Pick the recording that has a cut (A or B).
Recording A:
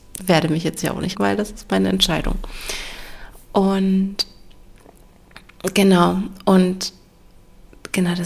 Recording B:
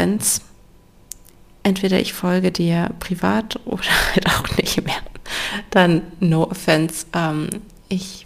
A